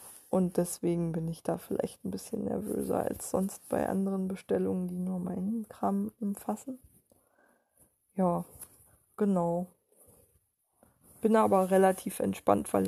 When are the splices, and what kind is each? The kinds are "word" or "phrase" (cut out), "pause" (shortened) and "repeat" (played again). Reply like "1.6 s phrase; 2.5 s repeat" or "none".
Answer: 8.9 s pause